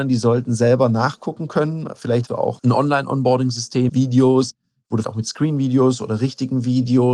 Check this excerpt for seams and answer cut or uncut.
cut